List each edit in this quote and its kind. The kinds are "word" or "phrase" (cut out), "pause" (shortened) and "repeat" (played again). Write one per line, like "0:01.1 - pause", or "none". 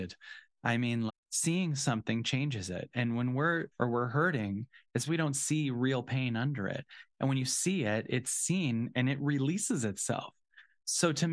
0:01.1 - word
0:03.7 - word
0:05.1 - word